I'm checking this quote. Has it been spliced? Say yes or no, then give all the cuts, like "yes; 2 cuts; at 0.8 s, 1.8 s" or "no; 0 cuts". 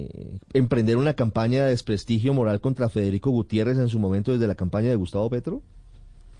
no; 0 cuts